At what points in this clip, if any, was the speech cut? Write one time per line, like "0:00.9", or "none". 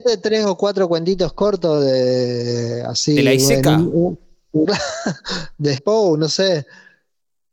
0:04.6
0:05.8